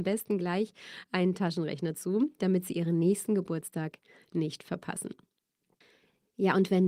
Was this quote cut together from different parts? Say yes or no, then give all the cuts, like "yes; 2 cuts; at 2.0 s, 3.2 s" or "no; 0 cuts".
no; 0 cuts